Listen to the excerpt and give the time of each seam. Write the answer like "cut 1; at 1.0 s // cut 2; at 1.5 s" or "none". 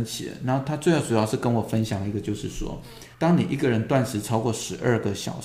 cut 1; at 3.1 s